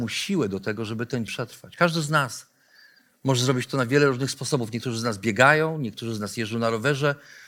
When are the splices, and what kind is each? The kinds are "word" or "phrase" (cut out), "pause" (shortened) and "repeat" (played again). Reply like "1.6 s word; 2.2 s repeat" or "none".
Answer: 1.3 s word